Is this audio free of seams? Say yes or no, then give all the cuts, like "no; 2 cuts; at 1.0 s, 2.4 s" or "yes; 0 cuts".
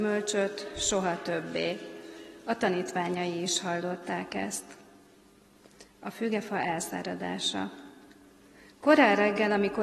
yes; 0 cuts